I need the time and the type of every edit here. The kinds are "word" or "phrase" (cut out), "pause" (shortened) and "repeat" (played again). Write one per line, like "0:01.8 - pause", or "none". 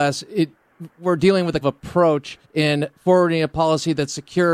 0:01.6 - word
0:02.4 - pause